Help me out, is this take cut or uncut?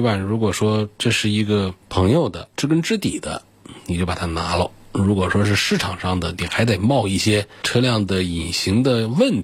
cut